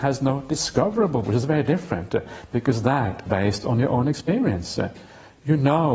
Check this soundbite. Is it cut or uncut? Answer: cut